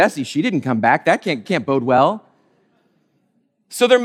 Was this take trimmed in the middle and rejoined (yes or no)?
yes